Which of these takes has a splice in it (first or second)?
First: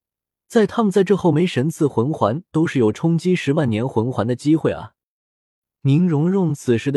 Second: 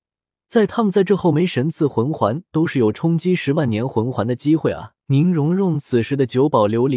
second